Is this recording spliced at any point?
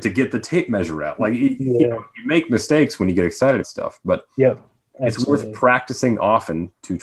yes; 1 cut; at 3.6 s

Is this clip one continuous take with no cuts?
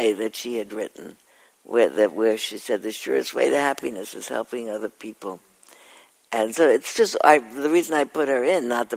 yes; 0 cuts

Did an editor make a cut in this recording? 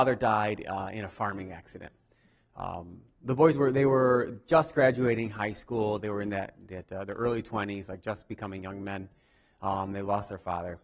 no; 0 cuts

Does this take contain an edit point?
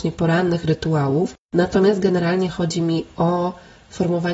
yes; 1 cut; at 1.4 s

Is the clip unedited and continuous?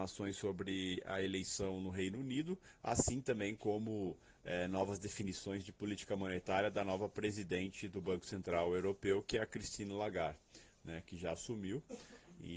yes; 0 cuts

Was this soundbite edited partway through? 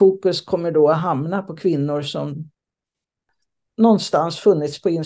no; 0 cuts

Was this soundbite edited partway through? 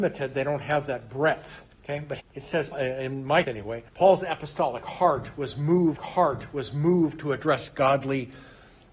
yes; 6 cuts; at 1.7 s, 2.2 s, 2.7 s, 3.4 s, 3.9 s, 6.0 s

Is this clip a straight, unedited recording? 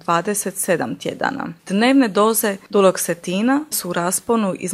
no; 2 cuts; at 1.6 s, 3.7 s

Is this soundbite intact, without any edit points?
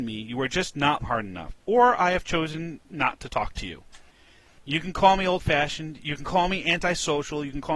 no; 1 cut; at 1.0 s

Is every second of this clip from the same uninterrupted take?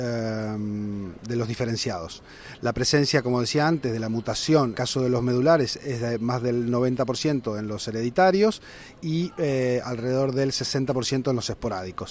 no; 1 cut; at 4.7 s

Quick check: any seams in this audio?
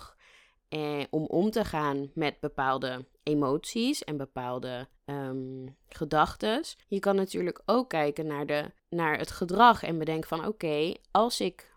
yes; 4 cuts; at 3.1 s, 5.0 s, 6.8 s, 8.8 s

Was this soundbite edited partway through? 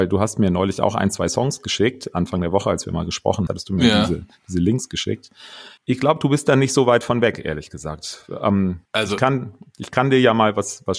yes; 3 cuts; at 3.5 s, 5.8 s, 8.8 s

